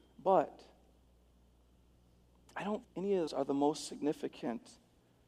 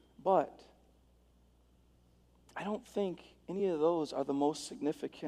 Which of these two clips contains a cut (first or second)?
first